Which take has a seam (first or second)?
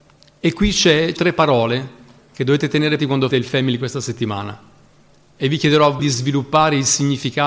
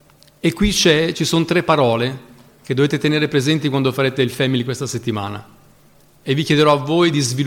first